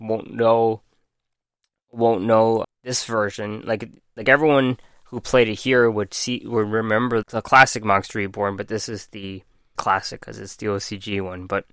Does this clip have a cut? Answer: yes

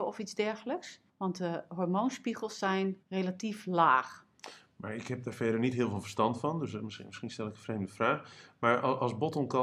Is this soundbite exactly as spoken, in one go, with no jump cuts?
no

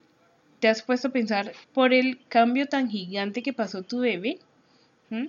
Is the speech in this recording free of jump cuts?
no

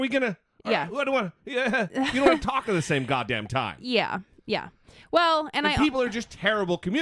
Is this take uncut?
yes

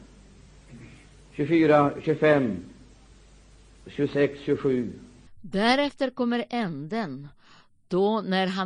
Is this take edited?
yes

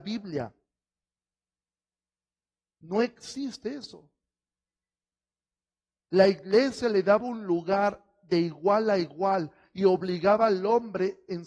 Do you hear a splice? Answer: no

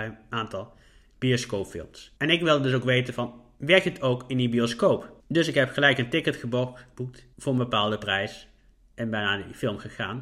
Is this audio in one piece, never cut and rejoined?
no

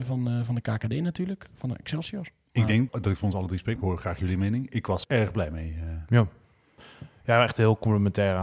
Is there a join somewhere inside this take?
yes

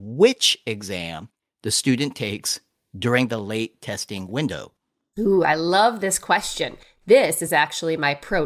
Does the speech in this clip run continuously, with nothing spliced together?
yes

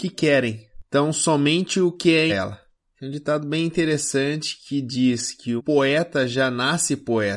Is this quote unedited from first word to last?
no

